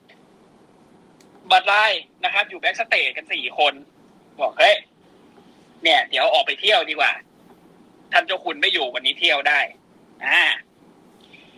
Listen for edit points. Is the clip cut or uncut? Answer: uncut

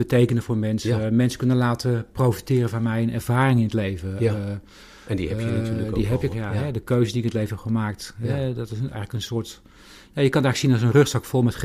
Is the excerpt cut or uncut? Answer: cut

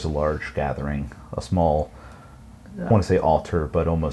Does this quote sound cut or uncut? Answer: cut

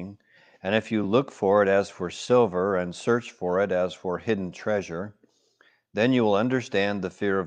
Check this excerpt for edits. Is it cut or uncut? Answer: uncut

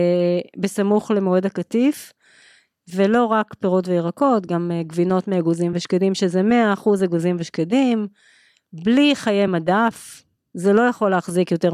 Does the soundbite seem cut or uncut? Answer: uncut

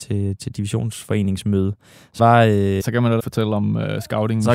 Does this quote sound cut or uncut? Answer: cut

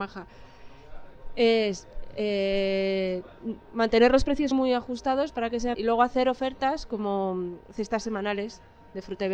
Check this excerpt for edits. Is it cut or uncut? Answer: cut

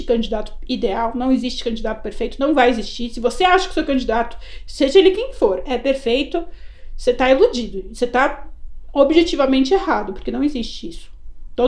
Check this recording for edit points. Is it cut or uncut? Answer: uncut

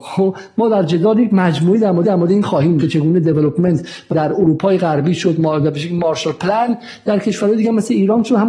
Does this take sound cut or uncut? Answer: cut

